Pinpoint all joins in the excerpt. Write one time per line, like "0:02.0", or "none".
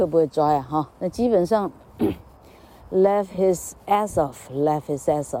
0:00.9